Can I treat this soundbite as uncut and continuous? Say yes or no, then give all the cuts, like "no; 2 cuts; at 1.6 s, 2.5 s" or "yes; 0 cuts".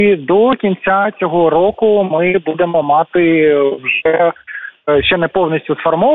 yes; 0 cuts